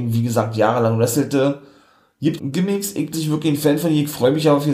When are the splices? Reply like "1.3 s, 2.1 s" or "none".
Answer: 2.4 s, 3.1 s